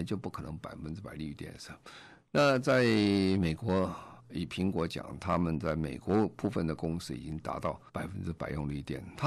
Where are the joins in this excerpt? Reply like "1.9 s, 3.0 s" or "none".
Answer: 4.2 s, 7.9 s

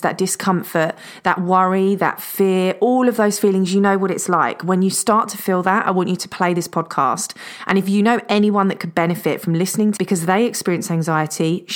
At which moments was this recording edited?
10.0 s

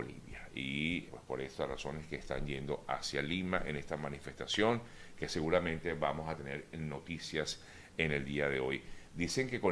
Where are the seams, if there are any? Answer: 1.1 s

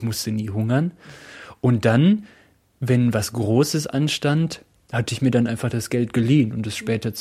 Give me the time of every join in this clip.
none

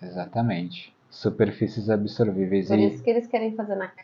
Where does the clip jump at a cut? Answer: 1.0 s

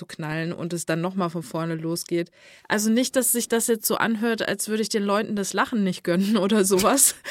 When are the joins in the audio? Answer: none

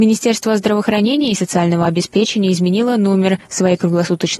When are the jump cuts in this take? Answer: none

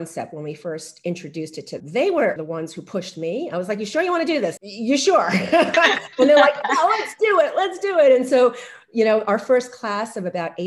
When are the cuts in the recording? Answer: 1.8 s, 2.4 s, 4.6 s

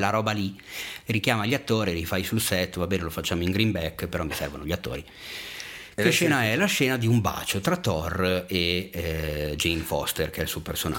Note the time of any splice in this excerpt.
none

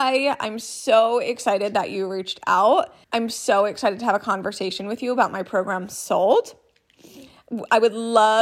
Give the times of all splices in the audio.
3.0 s

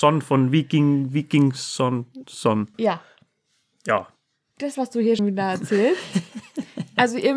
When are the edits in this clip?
2.2 s, 2.7 s, 4.7 s, 5.2 s

